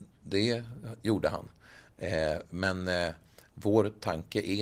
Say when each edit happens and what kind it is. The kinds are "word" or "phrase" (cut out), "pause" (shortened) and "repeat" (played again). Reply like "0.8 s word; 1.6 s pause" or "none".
none